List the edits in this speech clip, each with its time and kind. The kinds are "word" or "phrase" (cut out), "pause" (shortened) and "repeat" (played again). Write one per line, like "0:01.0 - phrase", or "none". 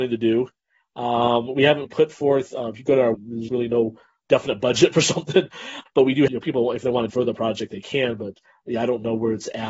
0:01.8 - word
0:03.1 - word
0:03.5 - word
0:04.2 - word
0:05.9 - word
0:06.3 - word
0:07.1 - word